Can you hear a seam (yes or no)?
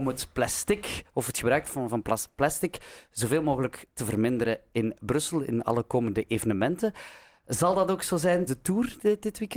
yes